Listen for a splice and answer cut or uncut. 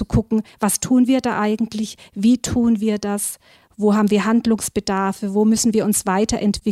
uncut